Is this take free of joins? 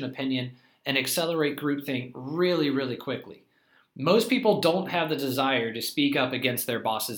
yes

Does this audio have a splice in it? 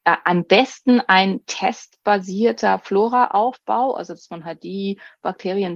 no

